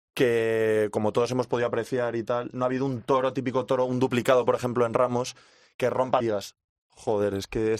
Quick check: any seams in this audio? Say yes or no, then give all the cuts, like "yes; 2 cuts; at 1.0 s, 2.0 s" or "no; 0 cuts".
yes; 1 cut; at 6.2 s